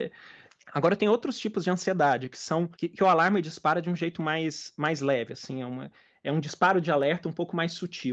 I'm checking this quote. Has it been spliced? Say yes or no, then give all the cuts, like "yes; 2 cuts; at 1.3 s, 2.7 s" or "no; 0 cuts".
yes; 1 cut; at 2.7 s